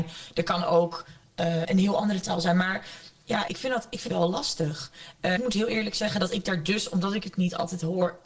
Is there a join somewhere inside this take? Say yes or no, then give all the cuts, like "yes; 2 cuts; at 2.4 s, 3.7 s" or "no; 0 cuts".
yes; 4 cuts; at 1.6 s, 3.5 s, 4.1 s, 5.4 s